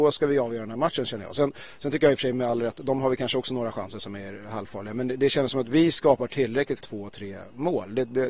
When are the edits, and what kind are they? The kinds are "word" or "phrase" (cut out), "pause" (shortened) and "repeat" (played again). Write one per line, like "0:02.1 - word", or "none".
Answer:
0:06.8 - phrase